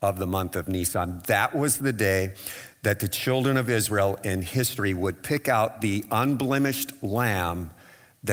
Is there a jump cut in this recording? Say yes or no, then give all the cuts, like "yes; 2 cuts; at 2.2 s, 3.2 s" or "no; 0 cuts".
no; 0 cuts